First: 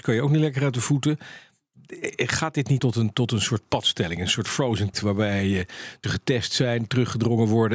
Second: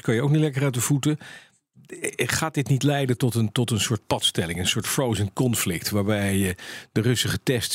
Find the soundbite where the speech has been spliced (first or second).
first